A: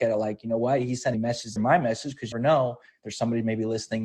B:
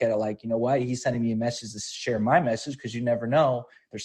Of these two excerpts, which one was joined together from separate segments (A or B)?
A